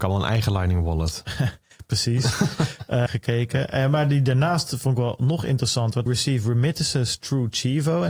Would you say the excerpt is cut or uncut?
cut